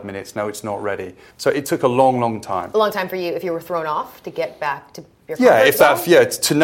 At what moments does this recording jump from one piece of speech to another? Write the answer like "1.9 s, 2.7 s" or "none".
1.3 s